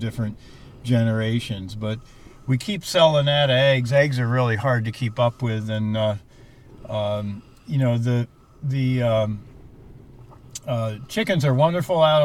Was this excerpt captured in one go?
yes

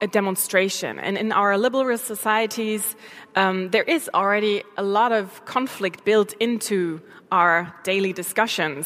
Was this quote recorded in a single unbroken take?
yes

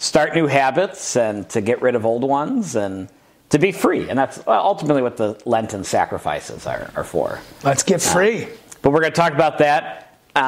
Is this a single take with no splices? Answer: yes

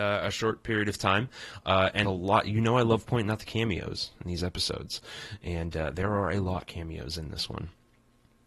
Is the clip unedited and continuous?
no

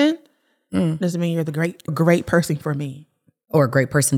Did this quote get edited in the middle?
yes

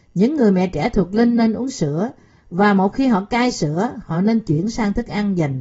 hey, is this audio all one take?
yes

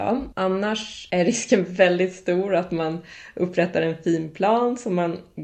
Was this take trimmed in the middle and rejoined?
no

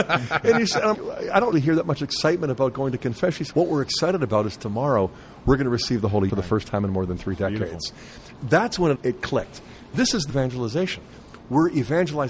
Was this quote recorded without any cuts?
no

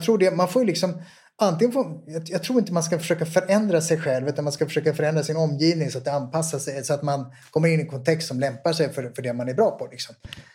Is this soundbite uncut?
yes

